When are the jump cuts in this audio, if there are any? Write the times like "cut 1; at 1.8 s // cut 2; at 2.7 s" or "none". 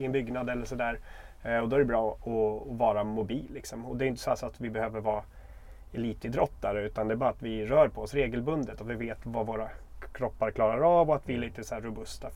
none